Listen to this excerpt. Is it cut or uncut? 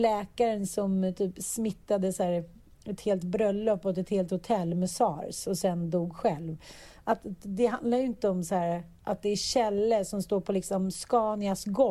uncut